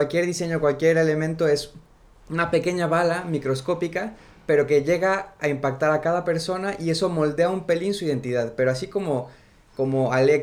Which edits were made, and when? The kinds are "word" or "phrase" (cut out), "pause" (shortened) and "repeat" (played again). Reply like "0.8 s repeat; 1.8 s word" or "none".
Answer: none